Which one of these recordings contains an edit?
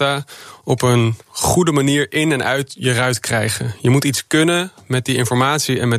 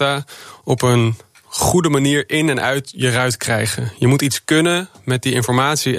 first; 1 cut; at 1.2 s

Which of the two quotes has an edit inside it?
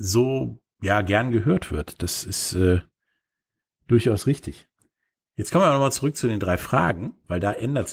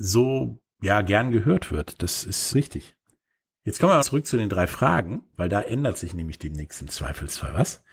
second; 2 cuts; at 2.5 s, 4.0 s

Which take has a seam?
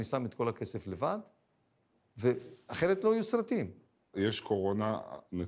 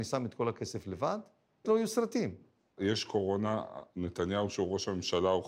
second; 1 cut; at 1.6 s

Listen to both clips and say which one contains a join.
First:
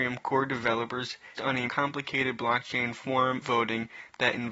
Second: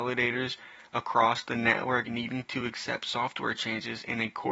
first; 3 cuts; at 1.4 s, 1.7 s, 3.4 s

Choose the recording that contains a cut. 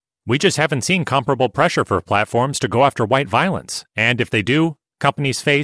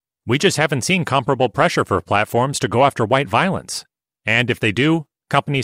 first; 1 cut; at 3.9 s

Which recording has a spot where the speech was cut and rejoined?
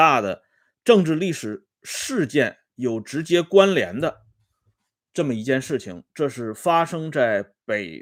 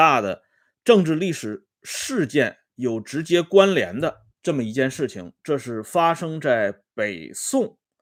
second; 1 cut; at 4.3 s

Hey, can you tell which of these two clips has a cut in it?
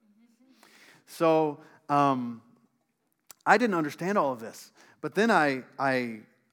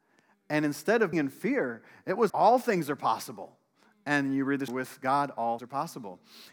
second; 4 cuts; at 1.1 s, 2.3 s, 4.7 s, 5.6 s

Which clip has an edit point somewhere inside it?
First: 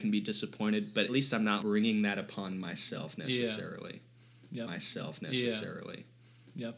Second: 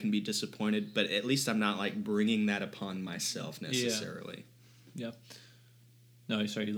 first; 3 cuts; at 1.1 s, 1.6 s, 4.7 s

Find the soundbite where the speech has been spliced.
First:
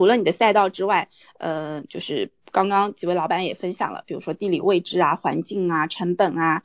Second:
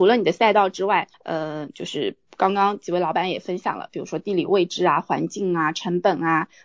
second; 1 cut; at 1.1 s

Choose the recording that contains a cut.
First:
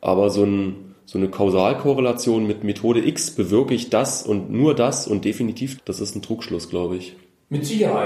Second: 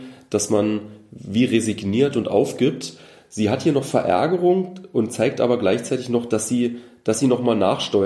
first; 1 cut; at 5.8 s

